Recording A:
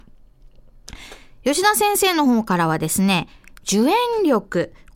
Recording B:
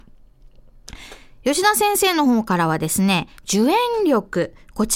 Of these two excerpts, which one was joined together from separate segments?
B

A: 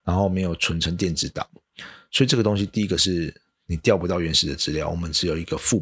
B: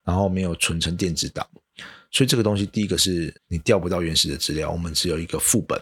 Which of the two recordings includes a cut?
B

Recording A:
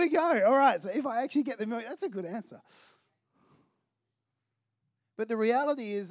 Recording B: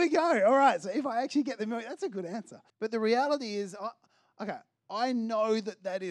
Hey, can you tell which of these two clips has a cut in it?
B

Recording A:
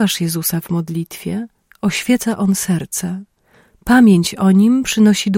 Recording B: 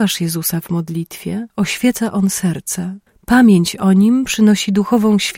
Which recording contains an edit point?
B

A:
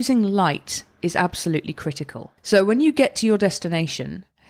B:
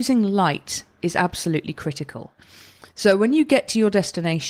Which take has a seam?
A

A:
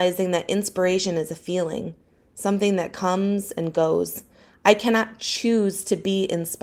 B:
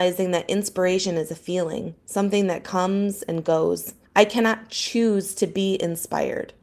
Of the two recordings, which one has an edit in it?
B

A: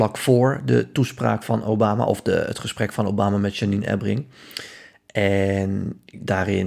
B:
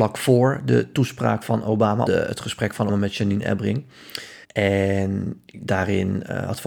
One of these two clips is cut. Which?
B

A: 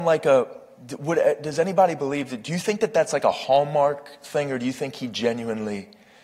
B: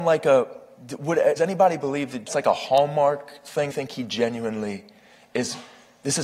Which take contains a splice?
B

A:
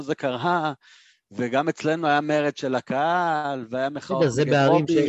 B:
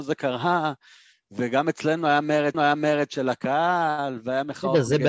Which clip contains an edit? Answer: B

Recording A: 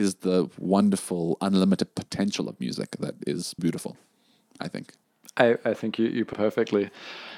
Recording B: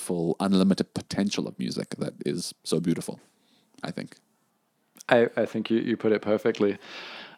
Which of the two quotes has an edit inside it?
A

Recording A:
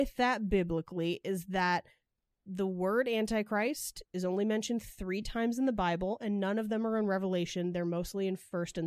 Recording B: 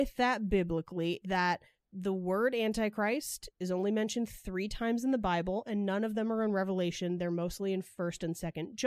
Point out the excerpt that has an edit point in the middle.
B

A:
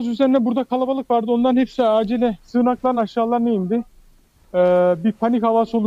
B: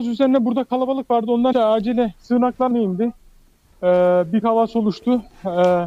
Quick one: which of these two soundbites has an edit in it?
B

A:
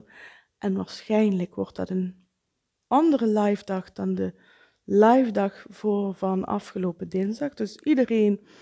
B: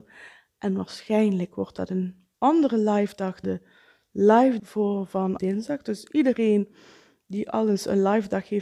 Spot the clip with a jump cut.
B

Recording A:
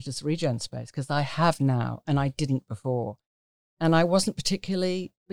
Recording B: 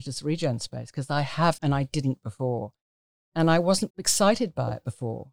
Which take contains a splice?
B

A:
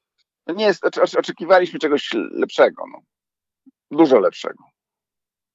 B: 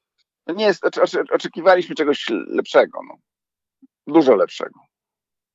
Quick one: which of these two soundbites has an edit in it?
A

